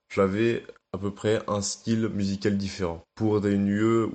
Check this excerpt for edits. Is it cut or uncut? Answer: cut